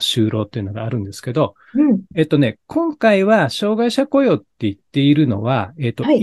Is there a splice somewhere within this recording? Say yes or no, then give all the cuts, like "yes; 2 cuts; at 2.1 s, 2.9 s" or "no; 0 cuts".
yes; 1 cut; at 2.1 s